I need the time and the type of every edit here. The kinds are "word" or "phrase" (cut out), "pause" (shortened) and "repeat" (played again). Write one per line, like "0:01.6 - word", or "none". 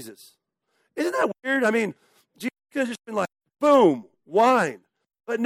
none